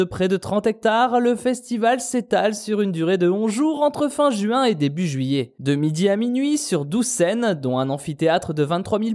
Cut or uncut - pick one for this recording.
uncut